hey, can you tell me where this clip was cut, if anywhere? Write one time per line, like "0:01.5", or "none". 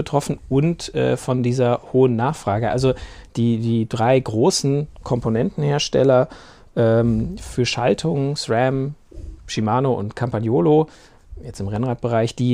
none